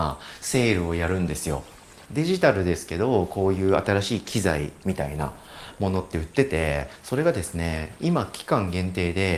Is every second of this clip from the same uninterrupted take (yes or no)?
yes